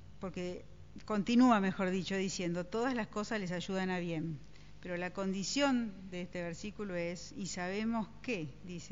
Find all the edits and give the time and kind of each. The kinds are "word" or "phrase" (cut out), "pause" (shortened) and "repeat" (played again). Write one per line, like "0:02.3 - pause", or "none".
none